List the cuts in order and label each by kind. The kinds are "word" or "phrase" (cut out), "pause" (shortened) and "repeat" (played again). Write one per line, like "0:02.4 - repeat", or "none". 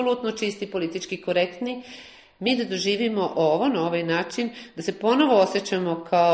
none